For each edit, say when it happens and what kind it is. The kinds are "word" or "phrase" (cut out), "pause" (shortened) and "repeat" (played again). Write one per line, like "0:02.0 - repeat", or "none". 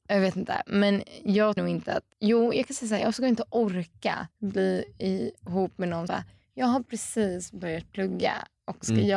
0:01.6 - word
0:02.1 - pause
0:04.3 - pause
0:06.1 - word